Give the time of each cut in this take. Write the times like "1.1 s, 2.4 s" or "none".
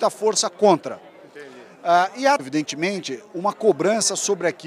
2.4 s